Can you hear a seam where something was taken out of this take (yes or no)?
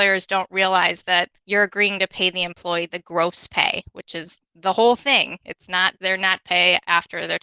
yes